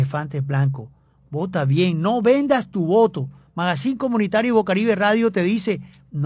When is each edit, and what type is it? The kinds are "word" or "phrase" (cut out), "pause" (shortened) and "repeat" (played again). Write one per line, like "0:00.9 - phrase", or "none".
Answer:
none